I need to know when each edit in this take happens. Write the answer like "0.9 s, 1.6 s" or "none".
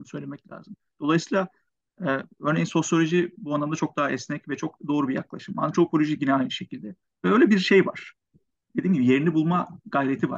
4.8 s